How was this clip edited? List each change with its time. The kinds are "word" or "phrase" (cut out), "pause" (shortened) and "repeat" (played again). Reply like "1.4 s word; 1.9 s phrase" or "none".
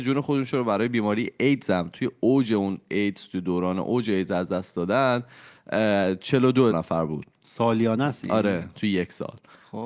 6.7 s word